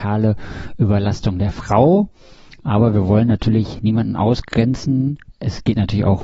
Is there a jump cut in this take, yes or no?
no